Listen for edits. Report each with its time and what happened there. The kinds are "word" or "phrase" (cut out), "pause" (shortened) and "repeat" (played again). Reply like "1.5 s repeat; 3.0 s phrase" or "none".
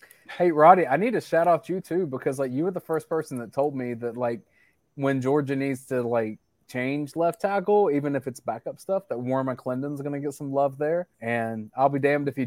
11.1 s pause